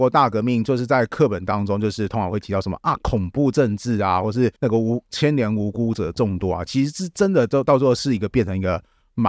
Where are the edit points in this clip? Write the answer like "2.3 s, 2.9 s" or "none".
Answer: 4.6 s